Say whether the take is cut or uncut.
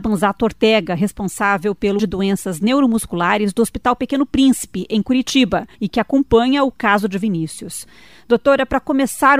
cut